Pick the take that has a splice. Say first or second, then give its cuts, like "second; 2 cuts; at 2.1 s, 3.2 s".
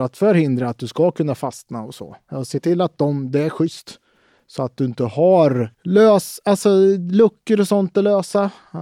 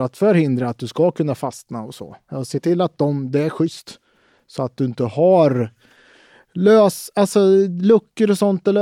first; 1 cut; at 5.7 s